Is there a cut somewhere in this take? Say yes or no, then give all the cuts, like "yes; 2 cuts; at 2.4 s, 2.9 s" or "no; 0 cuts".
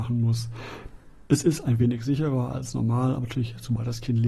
no; 0 cuts